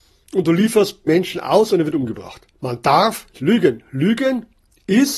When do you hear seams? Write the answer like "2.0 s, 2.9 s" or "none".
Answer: 1.1 s, 2.6 s, 3.3 s